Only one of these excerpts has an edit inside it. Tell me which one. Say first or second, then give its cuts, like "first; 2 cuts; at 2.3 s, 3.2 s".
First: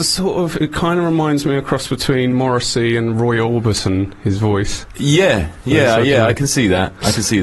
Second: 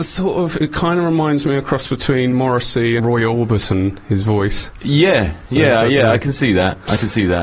second; 1 cut; at 3.0 s